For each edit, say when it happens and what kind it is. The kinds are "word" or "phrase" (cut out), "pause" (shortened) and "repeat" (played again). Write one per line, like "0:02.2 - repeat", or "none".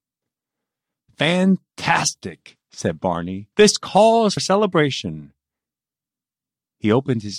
0:02.6 - pause
0:03.5 - pause
0:04.4 - word